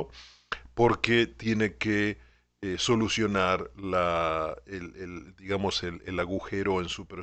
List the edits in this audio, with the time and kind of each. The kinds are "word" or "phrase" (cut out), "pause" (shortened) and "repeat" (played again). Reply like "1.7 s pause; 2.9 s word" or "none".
none

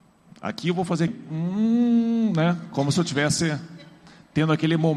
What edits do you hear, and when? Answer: 1.1 s word

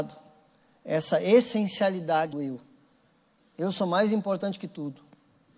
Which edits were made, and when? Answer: 2.3 s word

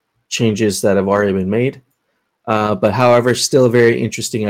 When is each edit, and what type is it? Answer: none

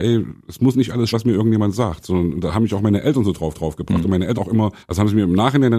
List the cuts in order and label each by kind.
1.1 s word; 3.5 s repeat; 4.4 s word; 4.8 s pause

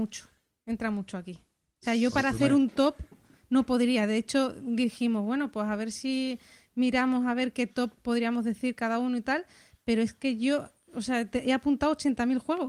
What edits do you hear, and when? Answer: none

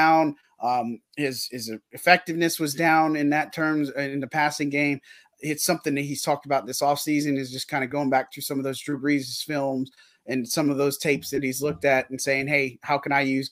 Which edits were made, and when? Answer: none

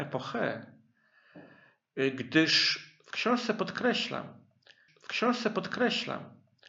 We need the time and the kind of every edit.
4.9 s repeat

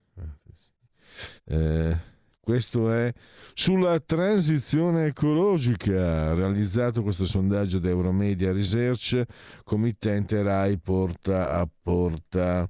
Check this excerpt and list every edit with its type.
1.4 s pause

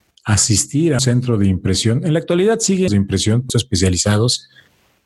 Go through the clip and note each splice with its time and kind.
1.0 s word; 2.9 s phrase; 3.5 s word

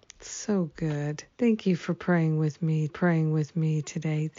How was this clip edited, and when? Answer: 1.3 s pause; 2.9 s repeat

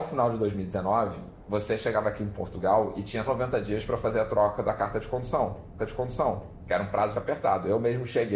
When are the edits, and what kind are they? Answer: 3.3 s word; 5.8 s repeat; 7.1 s word

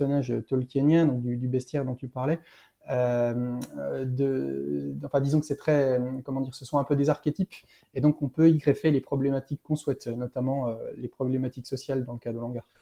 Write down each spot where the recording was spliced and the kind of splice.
none

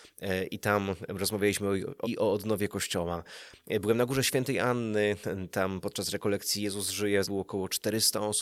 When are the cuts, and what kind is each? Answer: 2.0 s word; 7.2 s word

